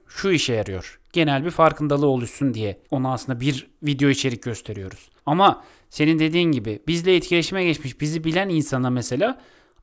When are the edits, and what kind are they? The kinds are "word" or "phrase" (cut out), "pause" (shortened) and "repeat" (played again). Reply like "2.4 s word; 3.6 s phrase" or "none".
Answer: 2.8 s pause; 5.2 s pause